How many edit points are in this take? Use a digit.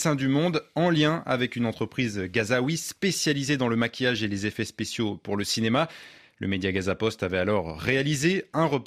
0